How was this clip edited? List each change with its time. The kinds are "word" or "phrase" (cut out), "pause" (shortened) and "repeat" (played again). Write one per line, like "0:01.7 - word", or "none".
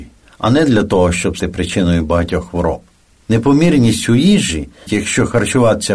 0:01.4 - word
0:04.9 - word

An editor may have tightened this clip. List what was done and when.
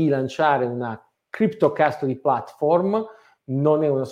none

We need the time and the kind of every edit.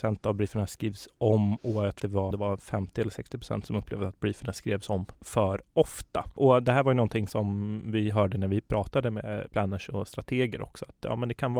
0:02.0 - word
0:02.3 - word

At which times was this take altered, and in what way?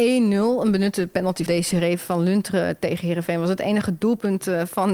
0:01.5 - word

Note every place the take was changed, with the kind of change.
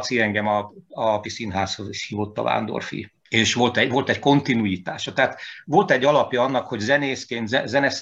0:01.2 - word
0:03.2 - pause

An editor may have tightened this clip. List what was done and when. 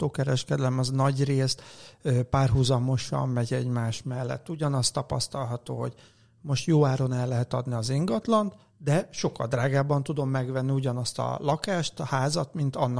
none

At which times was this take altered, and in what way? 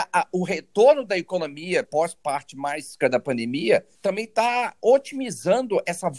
0:01.8 - word
0:03.0 - word
0:03.9 - pause

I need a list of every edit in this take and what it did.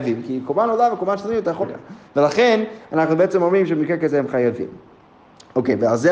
0:01.6 - phrase

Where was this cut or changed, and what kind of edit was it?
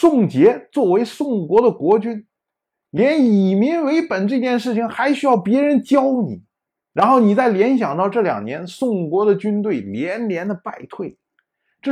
0:06.7 - pause

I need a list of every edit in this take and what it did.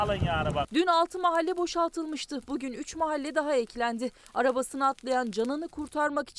none

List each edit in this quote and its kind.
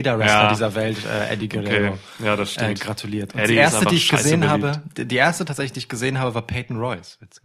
none

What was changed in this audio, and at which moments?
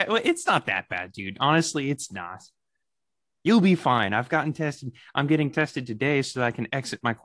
none

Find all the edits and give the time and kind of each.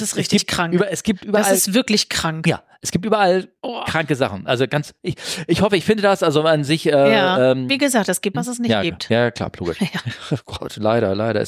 0:08.3 - word

